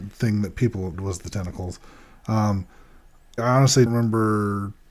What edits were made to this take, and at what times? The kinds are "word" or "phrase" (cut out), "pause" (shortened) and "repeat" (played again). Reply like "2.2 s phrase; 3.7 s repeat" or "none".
0.9 s word; 3.4 s word; 3.9 s word